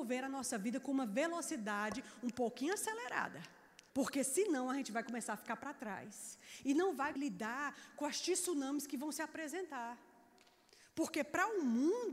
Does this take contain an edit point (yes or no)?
yes